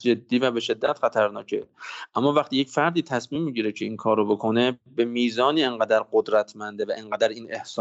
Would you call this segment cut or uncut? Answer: uncut